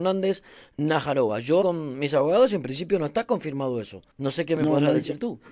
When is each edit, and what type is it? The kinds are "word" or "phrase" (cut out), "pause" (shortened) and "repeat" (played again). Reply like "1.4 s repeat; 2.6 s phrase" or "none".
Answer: 1.6 s word; 4.1 s pause